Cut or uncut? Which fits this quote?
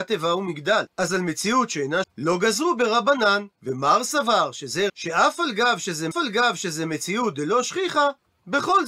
cut